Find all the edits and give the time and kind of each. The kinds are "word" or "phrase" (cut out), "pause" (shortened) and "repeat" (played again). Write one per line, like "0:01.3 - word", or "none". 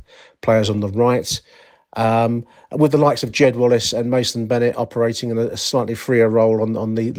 none